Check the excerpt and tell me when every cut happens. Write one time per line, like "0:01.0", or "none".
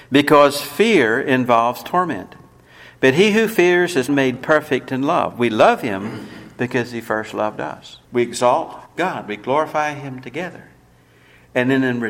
0:04.1
0:08.0
0:08.9